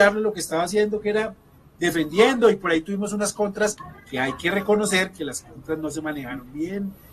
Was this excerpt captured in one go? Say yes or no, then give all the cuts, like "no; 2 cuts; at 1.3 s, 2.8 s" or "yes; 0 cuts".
yes; 0 cuts